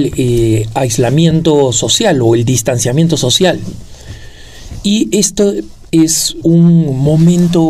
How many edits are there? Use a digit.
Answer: 1